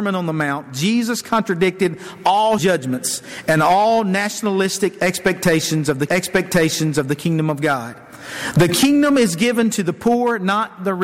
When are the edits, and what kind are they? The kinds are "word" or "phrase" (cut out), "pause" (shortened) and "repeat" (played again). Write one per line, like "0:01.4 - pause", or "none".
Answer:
0:02.6 - word
0:06.1 - repeat